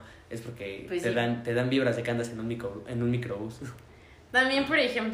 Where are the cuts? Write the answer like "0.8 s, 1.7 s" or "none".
none